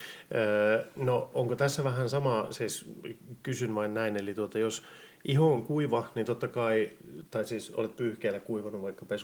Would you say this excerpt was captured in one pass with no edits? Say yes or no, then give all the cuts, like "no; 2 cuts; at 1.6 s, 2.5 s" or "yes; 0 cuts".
yes; 0 cuts